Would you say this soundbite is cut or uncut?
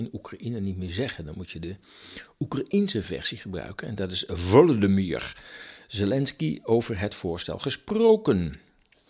uncut